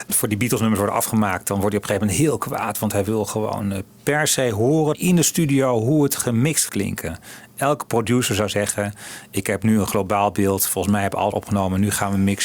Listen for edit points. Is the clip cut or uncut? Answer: cut